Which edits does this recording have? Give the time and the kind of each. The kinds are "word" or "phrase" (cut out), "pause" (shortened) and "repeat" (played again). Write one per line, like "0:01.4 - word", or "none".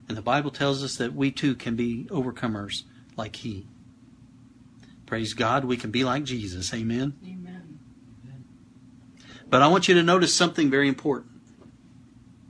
none